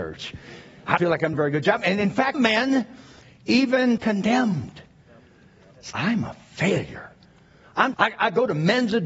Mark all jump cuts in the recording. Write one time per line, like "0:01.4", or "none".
0:01.0
0:01.3
0:02.3
0:04.0
0:05.9
0:07.9